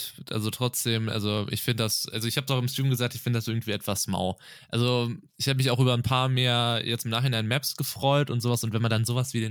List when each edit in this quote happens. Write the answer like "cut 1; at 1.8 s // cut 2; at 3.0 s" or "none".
cut 1; at 5.3 s